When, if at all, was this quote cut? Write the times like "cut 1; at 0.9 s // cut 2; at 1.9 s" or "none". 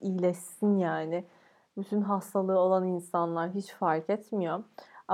none